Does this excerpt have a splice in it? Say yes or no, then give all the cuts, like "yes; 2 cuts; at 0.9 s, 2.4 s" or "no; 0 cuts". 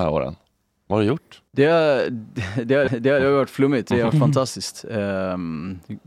yes; 3 cuts; at 1.5 s, 2.9 s, 3.9 s